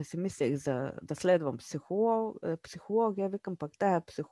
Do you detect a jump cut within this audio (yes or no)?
no